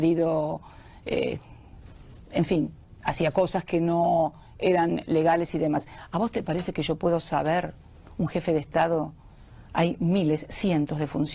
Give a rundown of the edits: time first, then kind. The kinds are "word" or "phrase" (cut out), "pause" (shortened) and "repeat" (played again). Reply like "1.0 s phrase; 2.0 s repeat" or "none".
9.6 s pause

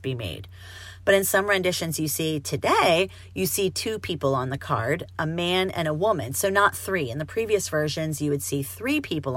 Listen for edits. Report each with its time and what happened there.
none

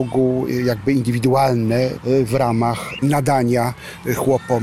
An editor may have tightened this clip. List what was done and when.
2.0 s word; 3.0 s word

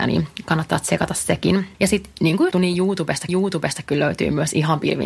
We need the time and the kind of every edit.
1.7 s pause; 2.5 s word; 3.3 s repeat

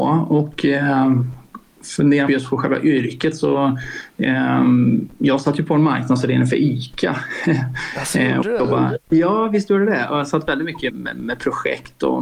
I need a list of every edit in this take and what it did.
2.3 s phrase; 10.9 s word

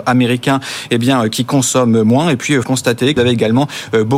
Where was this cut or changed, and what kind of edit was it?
2.6 s word; 3.2 s word

